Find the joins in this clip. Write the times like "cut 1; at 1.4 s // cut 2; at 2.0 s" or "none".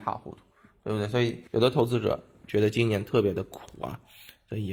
cut 1; at 1.5 s